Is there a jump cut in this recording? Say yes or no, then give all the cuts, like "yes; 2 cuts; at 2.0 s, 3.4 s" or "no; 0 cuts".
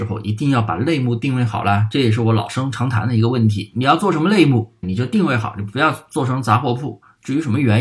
yes; 1 cut; at 4.8 s